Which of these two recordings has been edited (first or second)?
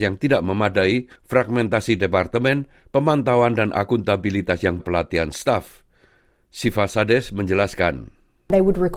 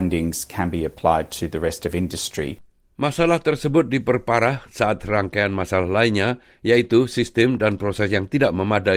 first